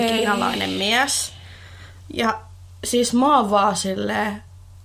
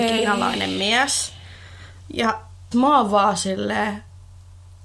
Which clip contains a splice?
second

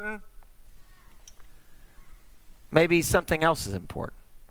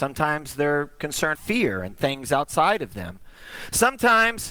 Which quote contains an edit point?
second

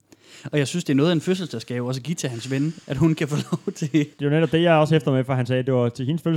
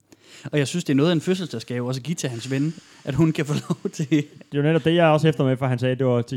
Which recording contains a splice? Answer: first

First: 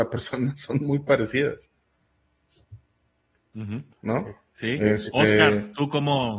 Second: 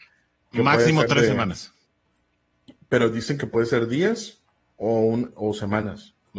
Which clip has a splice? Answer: first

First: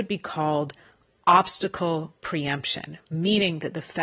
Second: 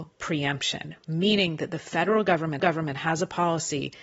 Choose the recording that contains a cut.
second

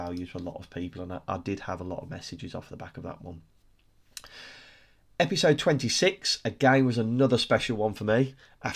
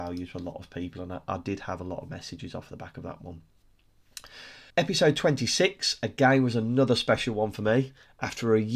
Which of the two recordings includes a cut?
second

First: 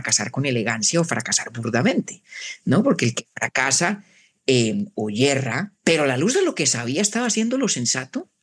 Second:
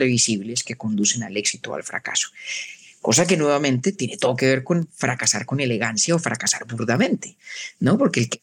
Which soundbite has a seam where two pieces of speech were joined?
first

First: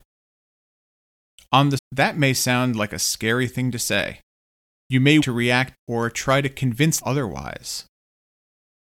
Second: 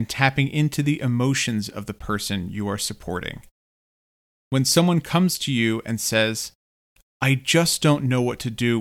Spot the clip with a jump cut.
first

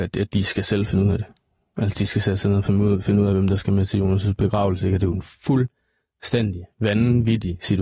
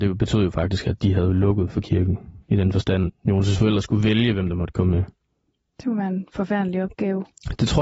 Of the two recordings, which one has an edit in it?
second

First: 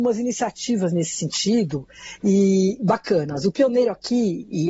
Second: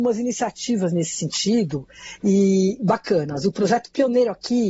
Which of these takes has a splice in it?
first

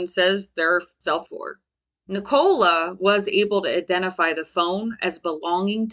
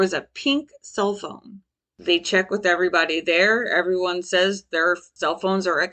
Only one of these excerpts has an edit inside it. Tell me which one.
first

